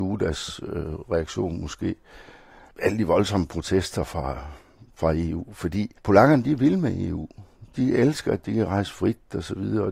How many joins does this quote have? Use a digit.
1